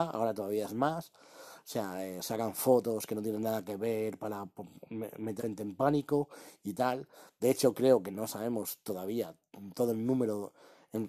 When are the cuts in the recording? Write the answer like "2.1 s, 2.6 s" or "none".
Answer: 5.4 s